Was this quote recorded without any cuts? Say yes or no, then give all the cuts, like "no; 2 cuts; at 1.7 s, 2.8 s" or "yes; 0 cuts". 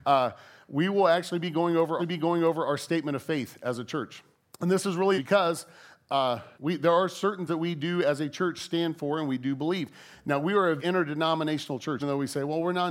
no; 7 cuts; at 2.0 s, 4.3 s, 5.2 s, 6.5 s, 7.5 s, 10.8 s, 12.0 s